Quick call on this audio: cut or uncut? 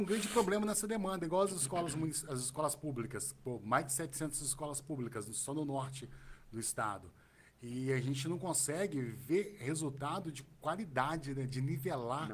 uncut